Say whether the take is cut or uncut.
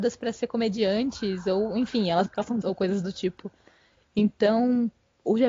cut